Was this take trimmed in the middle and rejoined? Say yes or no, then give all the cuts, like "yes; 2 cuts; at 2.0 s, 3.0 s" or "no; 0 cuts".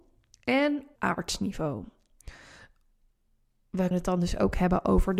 yes; 2 cuts; at 1.0 s, 3.9 s